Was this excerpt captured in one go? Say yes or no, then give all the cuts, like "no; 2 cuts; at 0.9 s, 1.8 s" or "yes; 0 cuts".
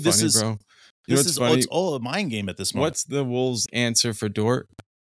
no; 1 cut; at 3.7 s